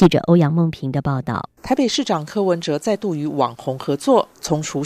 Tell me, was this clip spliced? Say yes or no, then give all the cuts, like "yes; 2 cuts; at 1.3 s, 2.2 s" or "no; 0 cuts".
yes; 1 cut; at 1.6 s